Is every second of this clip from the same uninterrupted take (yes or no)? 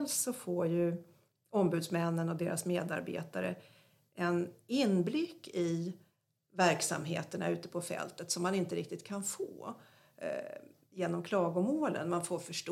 yes